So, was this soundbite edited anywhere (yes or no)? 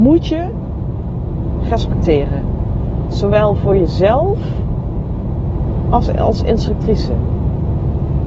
no